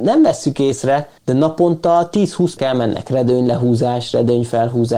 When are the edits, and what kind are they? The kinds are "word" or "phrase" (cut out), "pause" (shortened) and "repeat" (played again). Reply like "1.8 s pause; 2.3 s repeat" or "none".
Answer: 1.2 s pause; 2.6 s word

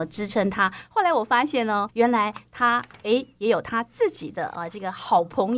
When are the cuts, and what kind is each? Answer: 1.9 s word

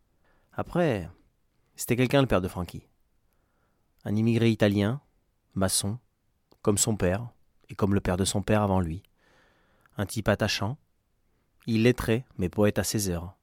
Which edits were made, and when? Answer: none

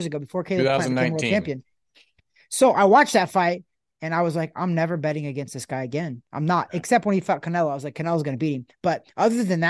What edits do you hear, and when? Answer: none

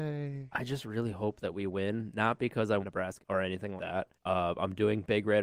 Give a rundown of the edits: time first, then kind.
2.8 s word; 3.2 s phrase; 3.8 s word; 4.2 s pause

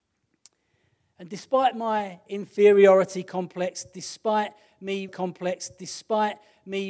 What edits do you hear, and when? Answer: 5.1 s repeat

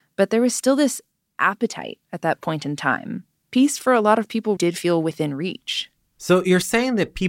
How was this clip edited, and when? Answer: 4.6 s word

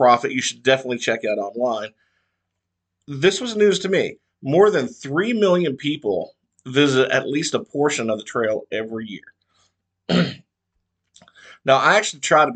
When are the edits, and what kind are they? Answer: none

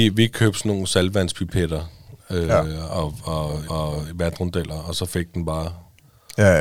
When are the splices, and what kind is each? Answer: 2.2 s pause; 3.7 s repeat

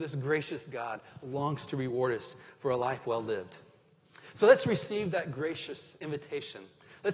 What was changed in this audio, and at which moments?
none

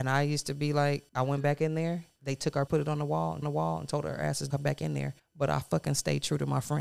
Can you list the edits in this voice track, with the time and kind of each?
1.1 s pause; 2.7 s word; 3.4 s repeat; 4.5 s word; 5.2 s pause

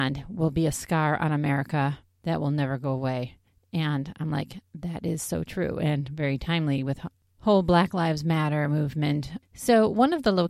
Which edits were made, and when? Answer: none

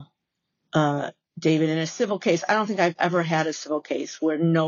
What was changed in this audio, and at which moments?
none

